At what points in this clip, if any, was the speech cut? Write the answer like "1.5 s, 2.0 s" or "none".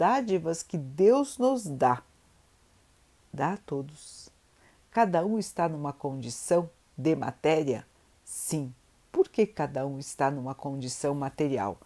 none

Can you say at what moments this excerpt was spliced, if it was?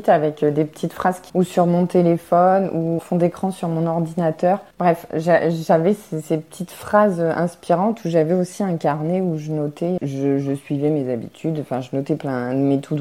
1.3 s, 3.0 s, 4.7 s

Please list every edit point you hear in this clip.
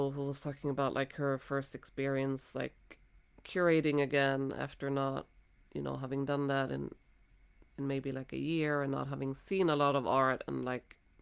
none

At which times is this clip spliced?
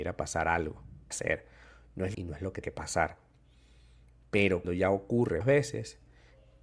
1.1 s, 2.1 s, 2.6 s, 4.6 s, 5.4 s

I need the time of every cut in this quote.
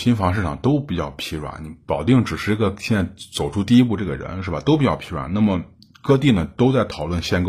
none

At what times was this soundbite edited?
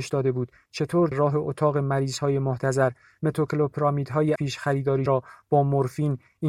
1.1 s, 4.4 s, 5.1 s

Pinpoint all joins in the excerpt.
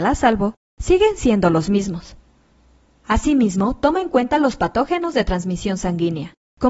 none

